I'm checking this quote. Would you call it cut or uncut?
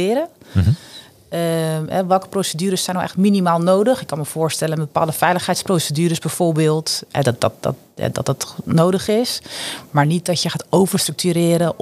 uncut